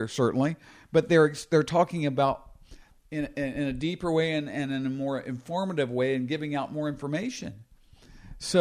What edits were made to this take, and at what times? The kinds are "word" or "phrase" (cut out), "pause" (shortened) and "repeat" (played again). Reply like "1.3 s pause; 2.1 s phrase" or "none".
none